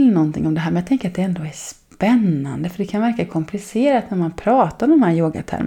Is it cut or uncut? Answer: uncut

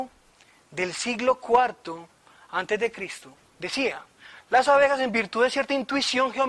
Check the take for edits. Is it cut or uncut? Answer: cut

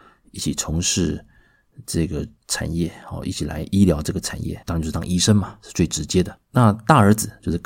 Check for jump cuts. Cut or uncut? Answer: cut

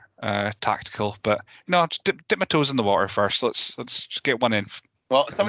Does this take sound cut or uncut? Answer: uncut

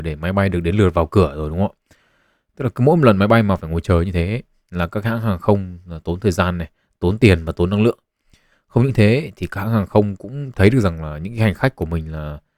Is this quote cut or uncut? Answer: uncut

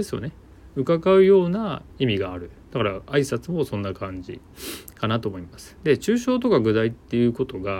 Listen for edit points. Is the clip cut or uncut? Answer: cut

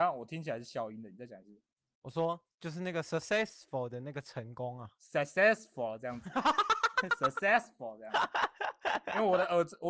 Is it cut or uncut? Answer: uncut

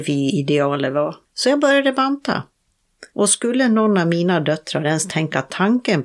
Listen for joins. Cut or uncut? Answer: cut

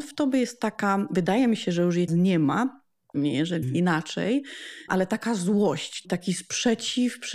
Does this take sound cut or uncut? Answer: cut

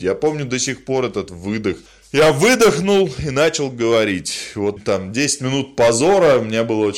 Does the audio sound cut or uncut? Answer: cut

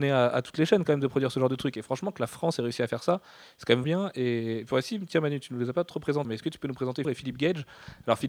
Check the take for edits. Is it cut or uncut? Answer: cut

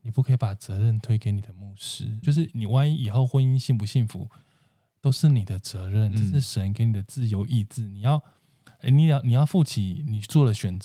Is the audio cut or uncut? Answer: cut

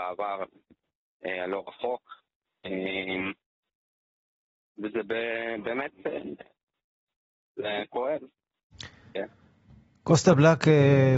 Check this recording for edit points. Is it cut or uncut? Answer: uncut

